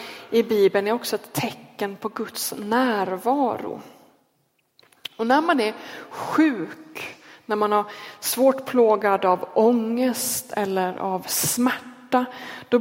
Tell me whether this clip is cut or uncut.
uncut